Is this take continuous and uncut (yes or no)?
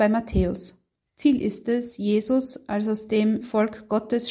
no